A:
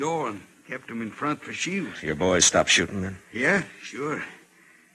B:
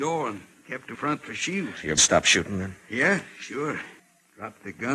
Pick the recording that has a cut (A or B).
B